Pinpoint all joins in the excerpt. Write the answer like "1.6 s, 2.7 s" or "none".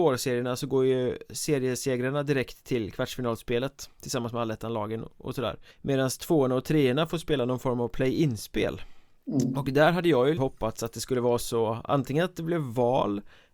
5.7 s, 9.2 s, 10.4 s